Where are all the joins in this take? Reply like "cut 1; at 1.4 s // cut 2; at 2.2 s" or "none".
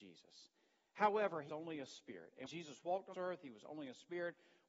cut 1; at 1.5 s // cut 2; at 2.5 s // cut 3; at 3.1 s